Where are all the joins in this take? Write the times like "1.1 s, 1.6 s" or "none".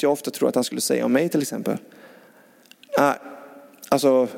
none

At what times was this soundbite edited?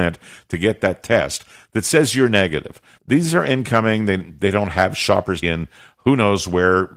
3.0 s, 5.4 s

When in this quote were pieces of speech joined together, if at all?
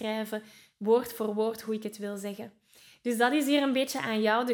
none

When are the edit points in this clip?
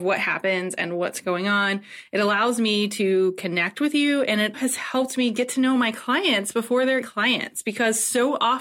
4.5 s, 7.0 s

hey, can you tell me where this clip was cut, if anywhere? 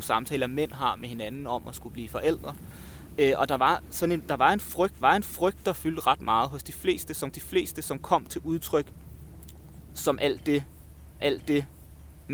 5.0 s, 7.3 s, 11.2 s

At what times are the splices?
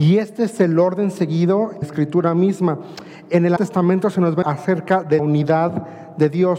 1.8 s, 3.6 s, 4.4 s, 5.2 s

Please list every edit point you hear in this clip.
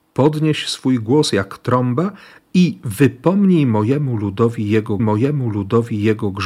5.0 s

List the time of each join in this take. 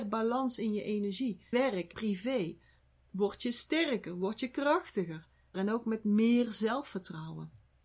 1.5 s, 1.9 s, 5.5 s

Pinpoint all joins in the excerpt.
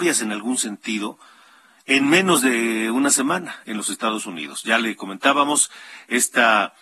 none

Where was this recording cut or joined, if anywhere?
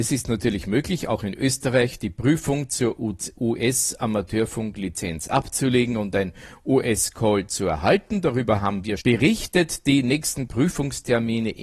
9.0 s, 10.5 s

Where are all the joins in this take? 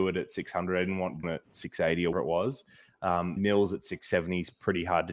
1.2 s, 2.1 s, 3.4 s

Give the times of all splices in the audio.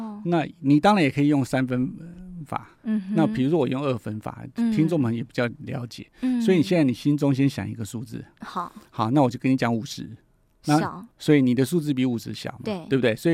2.8 s, 11.1 s

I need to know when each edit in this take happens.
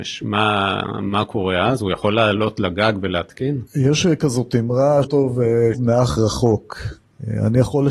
3.7 s, 5.0 s, 5.7 s

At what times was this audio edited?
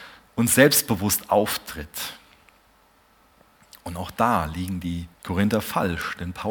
5.1 s

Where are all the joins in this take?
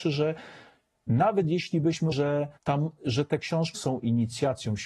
2.1 s, 2.6 s, 3.7 s

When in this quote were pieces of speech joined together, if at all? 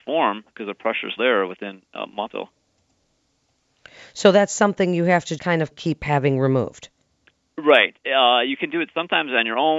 1.2 s, 2.3 s, 5.4 s, 5.7 s

